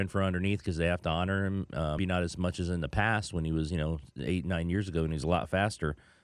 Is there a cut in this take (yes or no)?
yes